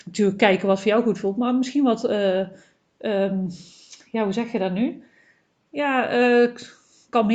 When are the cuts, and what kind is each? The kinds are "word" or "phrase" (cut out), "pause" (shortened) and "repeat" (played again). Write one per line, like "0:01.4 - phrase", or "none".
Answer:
none